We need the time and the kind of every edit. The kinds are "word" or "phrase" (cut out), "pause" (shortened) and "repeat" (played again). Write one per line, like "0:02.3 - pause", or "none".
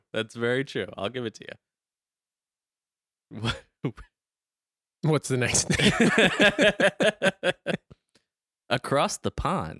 none